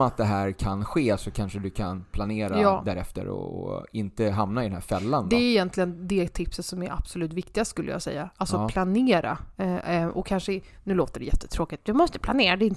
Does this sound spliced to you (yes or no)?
no